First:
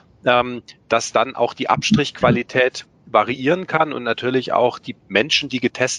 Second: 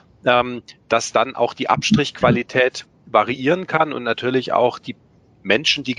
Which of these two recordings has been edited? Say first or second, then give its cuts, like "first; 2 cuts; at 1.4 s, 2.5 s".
first; 1 cut; at 5.0 s